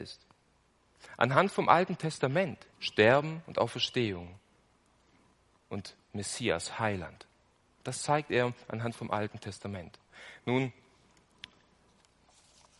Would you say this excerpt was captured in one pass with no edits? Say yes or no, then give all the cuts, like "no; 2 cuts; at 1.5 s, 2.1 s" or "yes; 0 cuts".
no; 1 cut; at 2.7 s